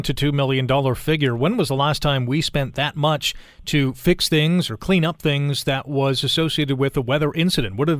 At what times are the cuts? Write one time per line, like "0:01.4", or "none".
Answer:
none